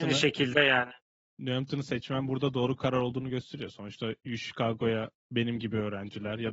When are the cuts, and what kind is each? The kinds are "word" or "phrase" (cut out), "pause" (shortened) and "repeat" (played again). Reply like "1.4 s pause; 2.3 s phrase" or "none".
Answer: 1.1 s pause; 5.2 s pause